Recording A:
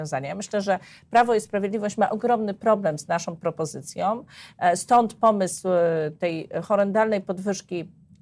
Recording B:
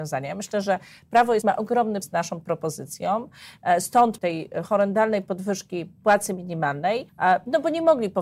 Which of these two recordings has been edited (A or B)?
B